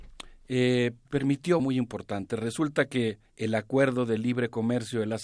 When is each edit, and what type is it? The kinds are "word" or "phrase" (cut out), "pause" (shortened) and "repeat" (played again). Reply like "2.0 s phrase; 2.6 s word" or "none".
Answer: 1.1 s word; 1.6 s phrase; 3.3 s pause